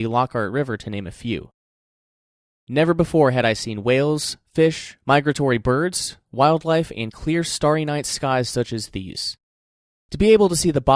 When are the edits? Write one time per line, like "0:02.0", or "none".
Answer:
none